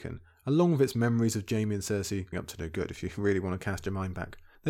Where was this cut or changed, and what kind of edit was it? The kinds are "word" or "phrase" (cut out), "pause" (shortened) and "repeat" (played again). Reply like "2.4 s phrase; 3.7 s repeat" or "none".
2.3 s word